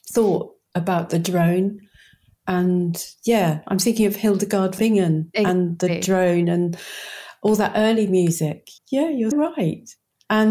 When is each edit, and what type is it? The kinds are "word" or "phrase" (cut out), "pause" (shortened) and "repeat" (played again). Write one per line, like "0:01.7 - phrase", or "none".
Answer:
0:04.8 - word
0:08.8 - word
0:09.3 - word

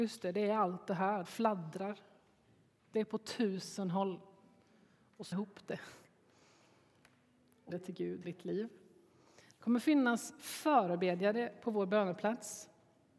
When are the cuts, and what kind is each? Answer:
0:01.2 - word
0:05.3 - word
0:07.7 - word
0:08.2 - word

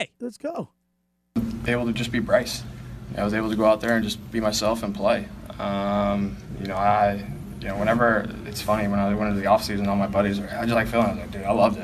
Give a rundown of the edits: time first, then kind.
none

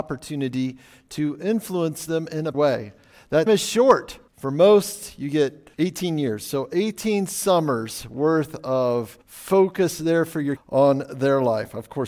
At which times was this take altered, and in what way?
0:02.5 - word
0:03.5 - word
0:04.3 - pause
0:05.7 - pause
0:09.2 - pause
0:10.6 - word

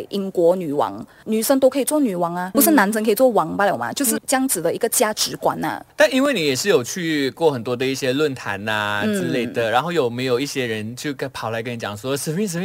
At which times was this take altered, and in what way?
0:02.5 - word
0:04.2 - word

